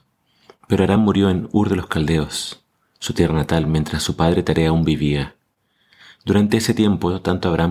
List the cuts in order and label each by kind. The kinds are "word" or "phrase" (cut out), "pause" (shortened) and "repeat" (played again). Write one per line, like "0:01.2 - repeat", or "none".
none